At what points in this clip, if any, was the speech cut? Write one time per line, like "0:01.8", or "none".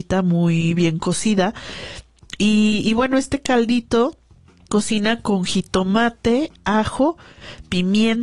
0:04.7